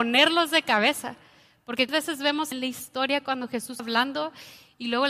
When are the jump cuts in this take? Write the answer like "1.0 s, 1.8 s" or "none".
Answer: 1.9 s, 2.5 s, 3.8 s